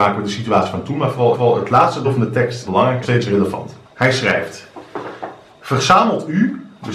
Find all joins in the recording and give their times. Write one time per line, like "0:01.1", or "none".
0:01.3
0:02.0
0:02.7
0:03.0
0:03.8
0:05.5